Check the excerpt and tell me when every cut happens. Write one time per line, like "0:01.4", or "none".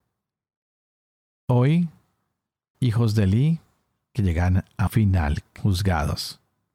0:02.7
0:04.1
0:04.9
0:05.6